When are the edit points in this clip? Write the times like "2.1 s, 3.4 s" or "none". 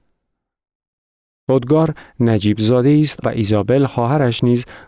3.2 s